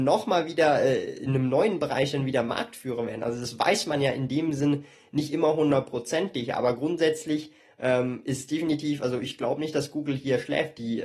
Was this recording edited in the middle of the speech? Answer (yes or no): no